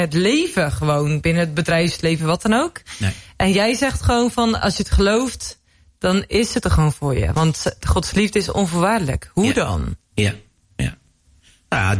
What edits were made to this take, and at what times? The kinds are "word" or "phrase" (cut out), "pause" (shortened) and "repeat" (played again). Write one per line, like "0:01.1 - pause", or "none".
none